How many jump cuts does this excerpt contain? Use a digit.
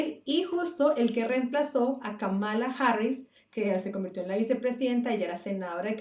0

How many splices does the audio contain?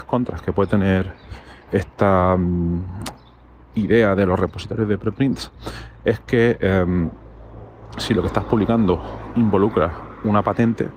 1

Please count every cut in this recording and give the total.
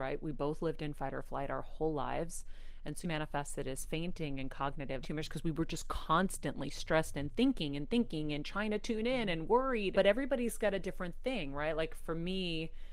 3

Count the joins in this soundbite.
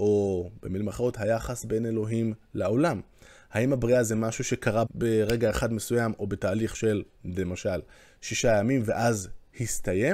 1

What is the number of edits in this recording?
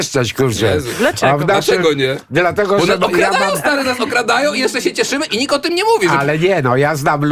0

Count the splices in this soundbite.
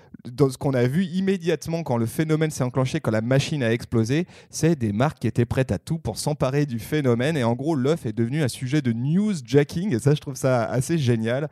0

